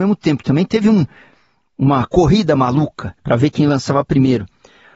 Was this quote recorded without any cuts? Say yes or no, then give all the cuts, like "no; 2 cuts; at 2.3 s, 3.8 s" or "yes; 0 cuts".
no; 1 cut; at 3.2 s